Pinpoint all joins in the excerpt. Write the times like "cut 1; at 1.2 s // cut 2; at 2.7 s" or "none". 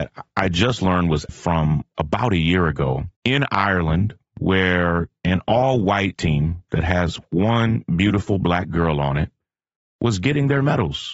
cut 1; at 1.3 s // cut 2; at 3.2 s // cut 3; at 6.2 s